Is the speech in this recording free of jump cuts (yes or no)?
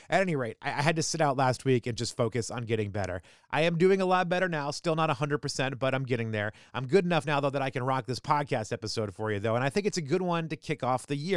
yes